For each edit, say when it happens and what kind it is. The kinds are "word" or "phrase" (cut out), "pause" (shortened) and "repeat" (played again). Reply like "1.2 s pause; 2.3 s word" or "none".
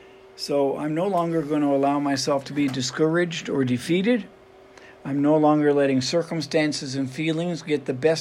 none